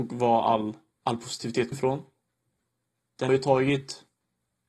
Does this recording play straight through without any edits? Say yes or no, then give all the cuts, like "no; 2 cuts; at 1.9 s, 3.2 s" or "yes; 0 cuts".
no; 2 cuts; at 1.7 s, 3.3 s